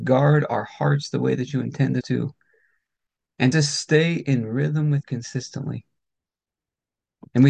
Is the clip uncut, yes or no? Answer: no